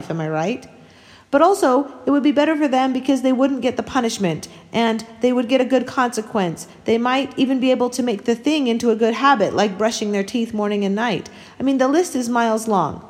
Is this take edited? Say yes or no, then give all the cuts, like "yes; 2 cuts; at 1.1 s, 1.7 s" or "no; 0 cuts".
no; 0 cuts